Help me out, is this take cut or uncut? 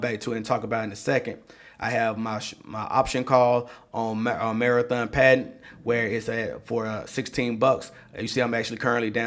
uncut